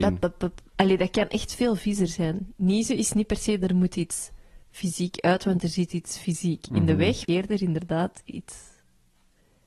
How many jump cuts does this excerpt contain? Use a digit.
2